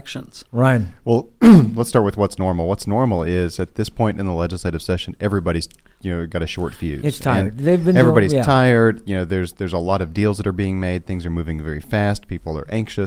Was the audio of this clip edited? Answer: no; 0 cuts

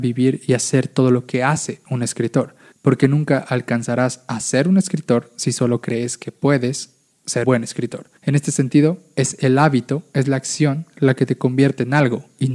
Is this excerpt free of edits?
no; 3 cuts; at 2.7 s, 7.4 s, 8.2 s

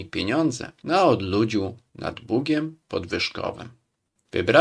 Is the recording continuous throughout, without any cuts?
yes; 0 cuts

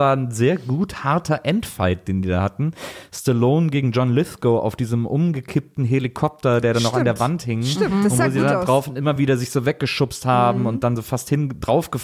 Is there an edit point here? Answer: no; 0 cuts

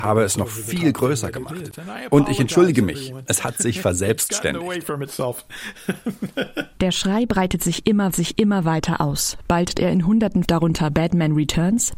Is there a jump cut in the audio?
yes; 3 cuts; at 8.1 s, 9.7 s, 10.4 s

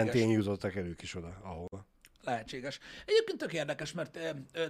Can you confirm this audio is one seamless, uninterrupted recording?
yes; 0 cuts

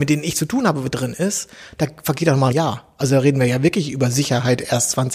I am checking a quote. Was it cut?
yes; 1 cut; at 2.5 s

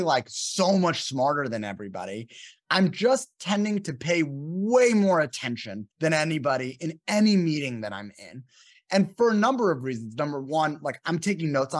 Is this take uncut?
no; 1 cut; at 5.9 s

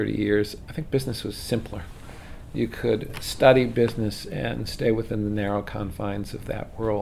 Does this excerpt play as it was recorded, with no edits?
yes; 0 cuts

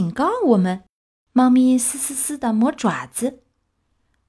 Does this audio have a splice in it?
yes; 1 cut; at 1.0 s

